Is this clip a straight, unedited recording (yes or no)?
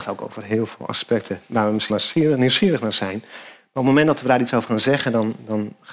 no